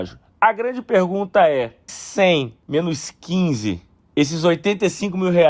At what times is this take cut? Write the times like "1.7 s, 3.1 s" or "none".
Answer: 1.9 s